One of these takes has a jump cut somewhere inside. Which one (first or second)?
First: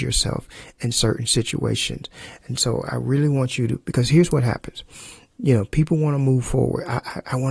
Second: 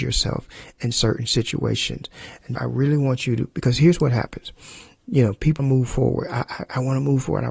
second